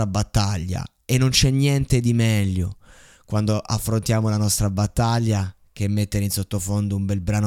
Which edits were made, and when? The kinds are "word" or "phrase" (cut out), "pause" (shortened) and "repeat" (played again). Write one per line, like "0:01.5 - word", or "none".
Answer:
none

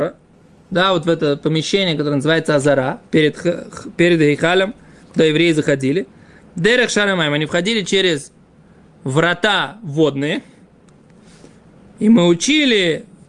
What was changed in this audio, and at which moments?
none

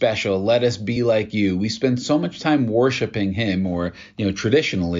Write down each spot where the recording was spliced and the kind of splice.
none

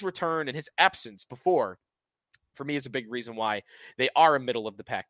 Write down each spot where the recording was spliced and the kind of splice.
none

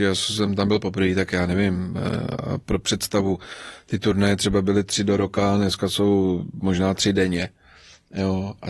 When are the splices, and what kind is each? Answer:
none

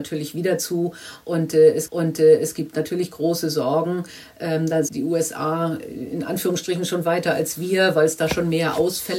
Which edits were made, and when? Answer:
0:01.9 - repeat
0:04.9 - word

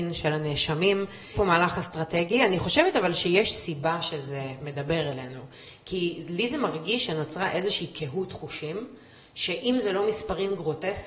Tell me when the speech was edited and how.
0:01.3 - word

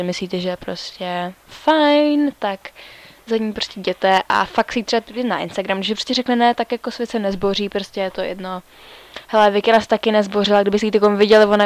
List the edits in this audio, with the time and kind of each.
none

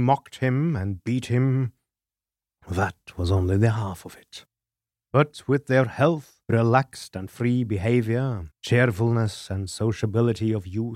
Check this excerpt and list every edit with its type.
0:06.4 - pause
0:08.5 - pause

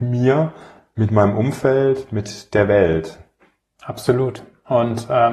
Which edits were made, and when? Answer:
none

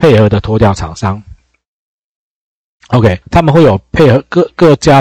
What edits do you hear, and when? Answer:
0:03.2 - pause

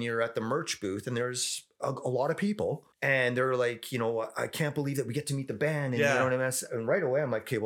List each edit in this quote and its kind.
0:02.9 - pause

